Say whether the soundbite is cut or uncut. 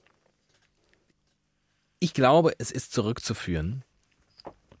uncut